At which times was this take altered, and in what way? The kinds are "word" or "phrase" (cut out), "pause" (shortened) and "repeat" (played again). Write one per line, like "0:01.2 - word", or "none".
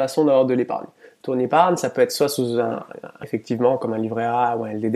0:03.2 - word